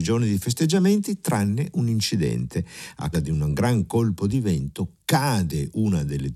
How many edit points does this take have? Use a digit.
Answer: 1